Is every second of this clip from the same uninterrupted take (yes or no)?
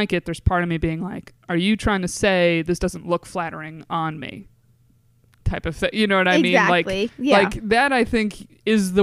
yes